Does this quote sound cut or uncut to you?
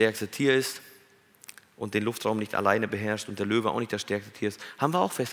uncut